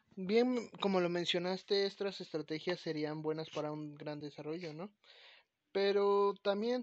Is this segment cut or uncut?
uncut